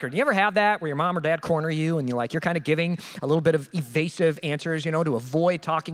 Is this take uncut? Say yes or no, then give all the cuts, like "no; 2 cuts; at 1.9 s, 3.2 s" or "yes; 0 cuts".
yes; 0 cuts